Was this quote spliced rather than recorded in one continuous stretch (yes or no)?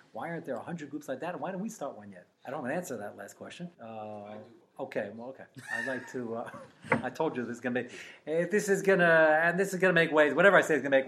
yes